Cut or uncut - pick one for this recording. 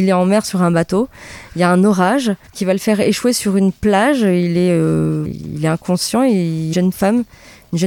cut